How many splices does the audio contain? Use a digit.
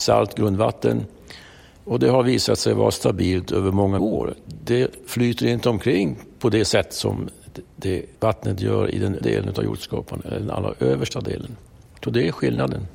3